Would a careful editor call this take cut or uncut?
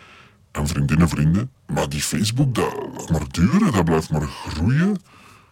cut